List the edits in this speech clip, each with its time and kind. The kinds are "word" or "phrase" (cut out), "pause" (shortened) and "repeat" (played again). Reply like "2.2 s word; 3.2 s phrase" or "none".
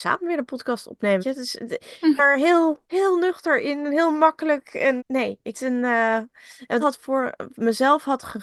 1.2 s word; 2.2 s word; 2.8 s pause; 5.0 s word; 5.5 s phrase; 6.8 s phrase